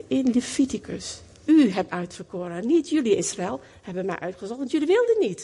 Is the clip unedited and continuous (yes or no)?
no